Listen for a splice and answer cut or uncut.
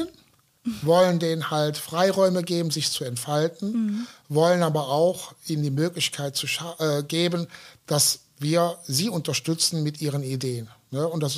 uncut